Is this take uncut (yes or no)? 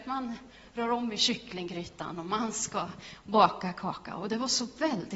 yes